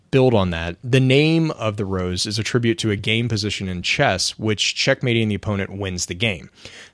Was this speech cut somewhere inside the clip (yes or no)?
no